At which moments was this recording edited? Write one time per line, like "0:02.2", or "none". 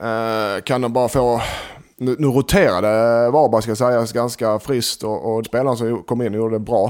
0:05.4